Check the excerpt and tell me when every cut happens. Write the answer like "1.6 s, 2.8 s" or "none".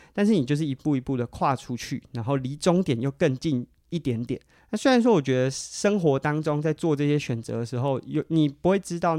4.6 s

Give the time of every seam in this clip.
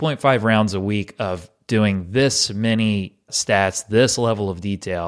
3.3 s

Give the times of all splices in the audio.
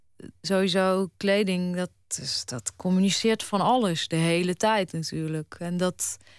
none

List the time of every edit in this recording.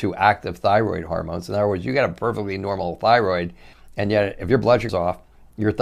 4.9 s

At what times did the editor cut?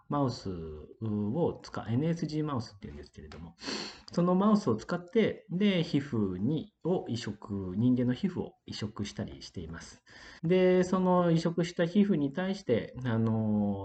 10.4 s

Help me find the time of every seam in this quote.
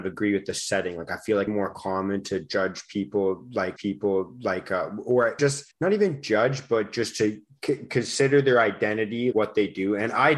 1.5 s, 3.8 s, 5.4 s, 5.7 s, 9.3 s

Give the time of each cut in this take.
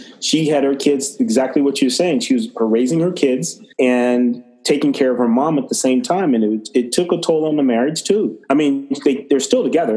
3.7 s, 8.4 s

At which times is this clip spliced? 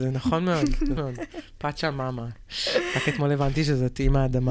1.0 s

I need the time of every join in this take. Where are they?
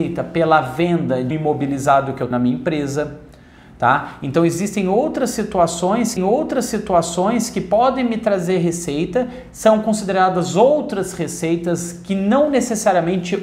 1.3 s, 2.3 s, 6.2 s

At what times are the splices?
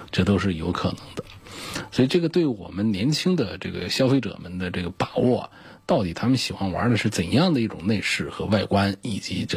none

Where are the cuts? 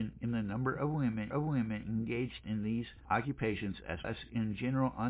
1.3 s, 3.0 s, 4.0 s

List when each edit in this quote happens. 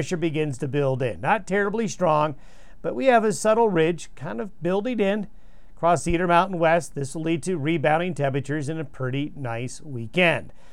none

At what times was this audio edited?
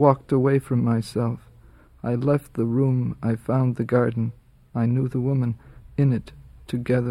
none

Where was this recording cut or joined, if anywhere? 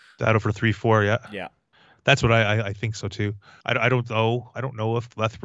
1.7 s, 3.6 s

